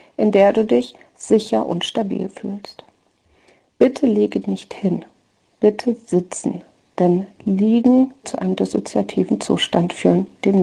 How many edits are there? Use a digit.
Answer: 2